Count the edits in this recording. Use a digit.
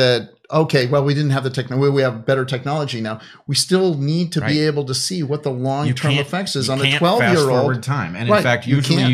0